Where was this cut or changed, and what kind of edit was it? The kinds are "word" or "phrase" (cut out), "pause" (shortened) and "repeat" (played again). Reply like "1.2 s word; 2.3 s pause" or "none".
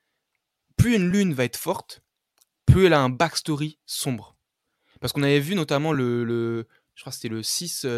none